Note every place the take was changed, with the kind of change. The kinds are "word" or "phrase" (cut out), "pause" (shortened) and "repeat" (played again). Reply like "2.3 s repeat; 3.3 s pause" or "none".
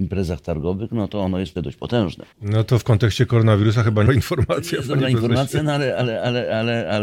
1.6 s word; 2.3 s pause; 4.1 s phrase

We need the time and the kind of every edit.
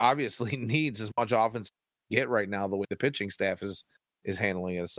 none

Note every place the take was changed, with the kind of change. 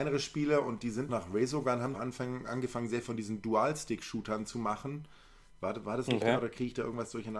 1.1 s word; 1.9 s word; 3.0 s word

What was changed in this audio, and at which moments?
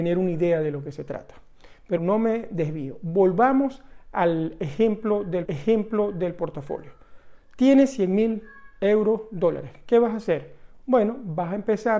2.0 s word; 5.4 s repeat

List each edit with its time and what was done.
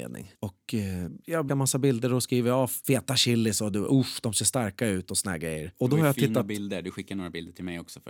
1.5 s word

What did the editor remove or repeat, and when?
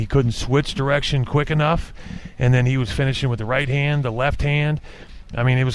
none

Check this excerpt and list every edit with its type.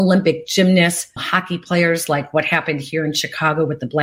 1.2 s word

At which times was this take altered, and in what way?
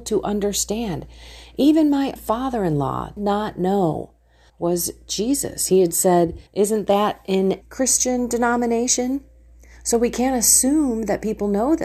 2.2 s word; 3.2 s word; 4.5 s phrase; 6.5 s pause; 7.6 s word

